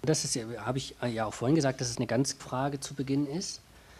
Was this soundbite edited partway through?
yes; 2 cuts; at 1.9 s, 2.4 s

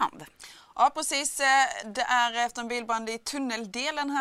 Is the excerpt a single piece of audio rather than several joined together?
yes; 0 cuts

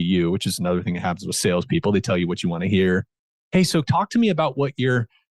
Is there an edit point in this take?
no; 0 cuts

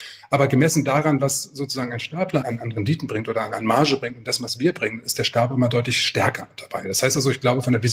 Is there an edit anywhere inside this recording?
yes; 1 cut; at 2.4 s

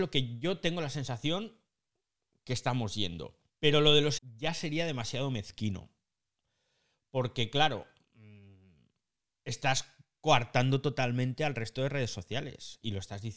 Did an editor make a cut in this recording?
yes; 2 cuts; at 3.5 s, 4.2 s

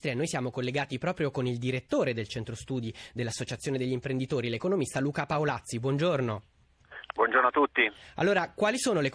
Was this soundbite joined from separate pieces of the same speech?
no; 0 cuts

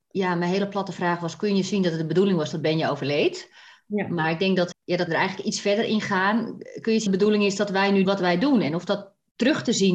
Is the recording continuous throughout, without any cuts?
no; 4 cuts; at 4.7 s, 5.1 s, 7.1 s, 8.1 s

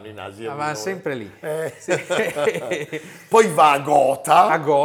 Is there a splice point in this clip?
no; 0 cuts

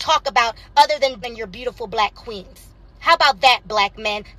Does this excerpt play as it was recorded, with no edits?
no; 1 cut; at 1.2 s

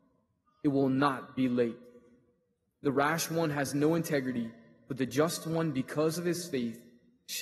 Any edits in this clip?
no; 0 cuts

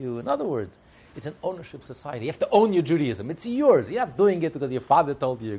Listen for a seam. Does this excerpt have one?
no; 0 cuts

